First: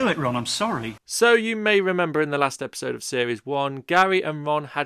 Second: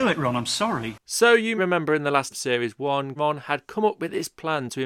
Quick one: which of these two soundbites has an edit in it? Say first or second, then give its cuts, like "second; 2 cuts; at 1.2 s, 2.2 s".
second; 3 cuts; at 1.6 s, 2.3 s, 3.2 s